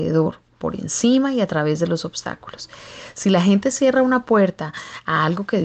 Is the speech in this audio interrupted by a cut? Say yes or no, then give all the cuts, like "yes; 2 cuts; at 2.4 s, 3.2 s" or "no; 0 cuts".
no; 0 cuts